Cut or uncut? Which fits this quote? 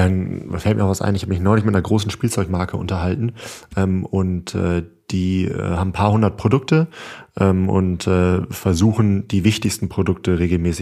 uncut